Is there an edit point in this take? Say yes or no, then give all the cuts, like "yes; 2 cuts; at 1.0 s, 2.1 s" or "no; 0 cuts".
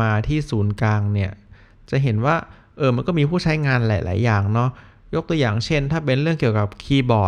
no; 0 cuts